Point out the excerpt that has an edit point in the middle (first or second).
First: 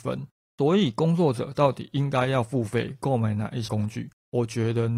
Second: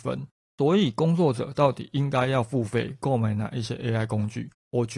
first